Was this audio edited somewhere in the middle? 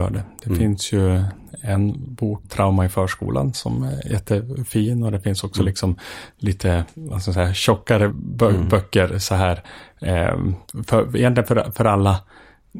yes; 2 cuts; at 2.4 s, 8.1 s

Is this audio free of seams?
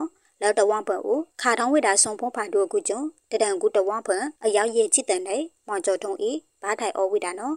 no; 2 cuts; at 1.3 s, 4.4 s

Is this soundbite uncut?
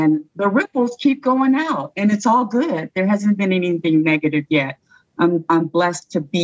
yes; 0 cuts

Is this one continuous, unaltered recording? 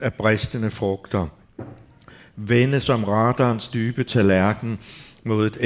yes; 0 cuts

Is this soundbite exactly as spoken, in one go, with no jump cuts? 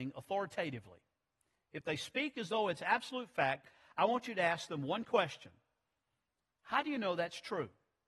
yes; 0 cuts

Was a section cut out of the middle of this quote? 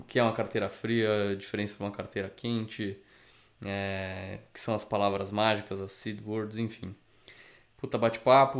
no; 0 cuts

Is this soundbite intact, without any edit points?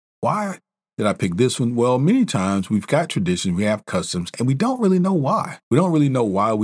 no; 1 cut; at 5.6 s

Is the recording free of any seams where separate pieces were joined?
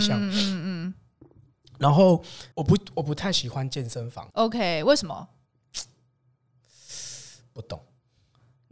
no; 2 cuts; at 2.5 s, 4.3 s

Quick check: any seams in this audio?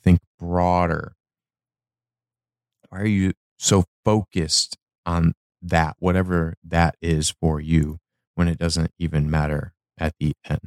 no; 0 cuts

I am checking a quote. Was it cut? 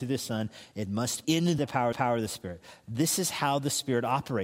yes; 3 cuts; at 1.2 s, 1.6 s, 1.9 s

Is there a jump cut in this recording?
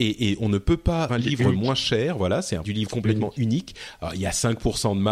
yes; 2 cuts; at 1.1 s, 2.6 s

